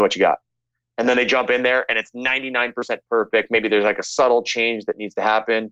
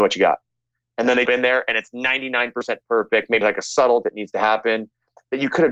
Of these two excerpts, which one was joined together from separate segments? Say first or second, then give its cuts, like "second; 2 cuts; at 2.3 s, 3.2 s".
second; 3 cuts; at 1.2 s, 3.4 s, 4.0 s